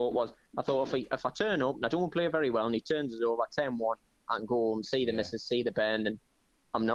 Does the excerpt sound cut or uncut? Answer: uncut